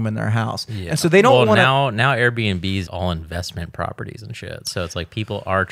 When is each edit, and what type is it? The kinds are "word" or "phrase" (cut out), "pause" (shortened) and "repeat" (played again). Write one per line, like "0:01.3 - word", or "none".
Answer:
0:02.9 - phrase